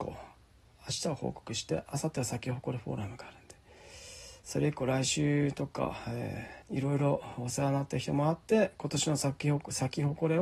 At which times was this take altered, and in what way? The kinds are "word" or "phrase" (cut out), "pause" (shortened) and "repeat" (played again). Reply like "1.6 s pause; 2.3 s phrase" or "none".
6.6 s pause